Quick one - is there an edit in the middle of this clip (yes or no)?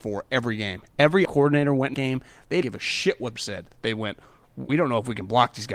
yes